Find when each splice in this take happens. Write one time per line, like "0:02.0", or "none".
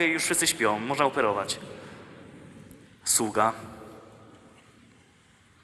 0:02.8